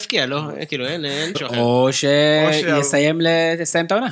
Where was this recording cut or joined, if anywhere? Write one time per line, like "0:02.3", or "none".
0:01.3